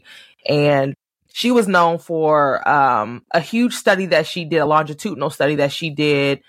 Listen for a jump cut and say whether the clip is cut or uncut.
uncut